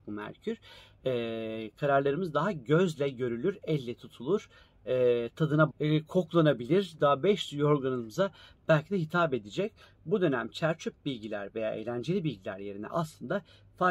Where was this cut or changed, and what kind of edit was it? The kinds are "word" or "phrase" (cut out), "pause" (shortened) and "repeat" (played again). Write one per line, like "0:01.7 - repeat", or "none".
0:05.7 - word